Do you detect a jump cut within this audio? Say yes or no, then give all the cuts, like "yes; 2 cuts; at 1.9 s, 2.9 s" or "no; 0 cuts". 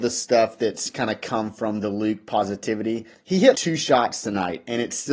yes; 2 cuts; at 3.1 s, 3.5 s